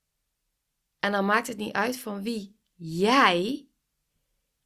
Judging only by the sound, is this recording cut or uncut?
uncut